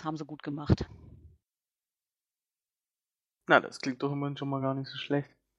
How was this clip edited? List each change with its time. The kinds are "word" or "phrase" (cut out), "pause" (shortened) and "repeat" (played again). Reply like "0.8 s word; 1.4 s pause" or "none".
none